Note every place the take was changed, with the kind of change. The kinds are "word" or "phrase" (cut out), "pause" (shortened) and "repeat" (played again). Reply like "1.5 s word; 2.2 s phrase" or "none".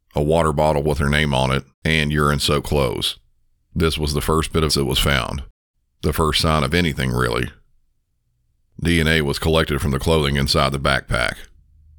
1.7 s pause; 3.5 s pause; 4.7 s word; 5.7 s pause